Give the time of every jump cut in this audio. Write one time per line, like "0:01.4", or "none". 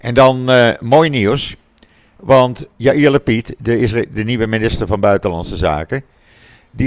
0:02.7